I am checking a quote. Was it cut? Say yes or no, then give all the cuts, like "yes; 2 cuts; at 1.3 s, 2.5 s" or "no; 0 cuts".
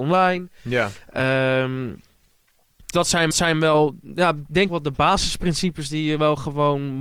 yes; 3 cuts; at 2.9 s, 3.3 s, 4.7 s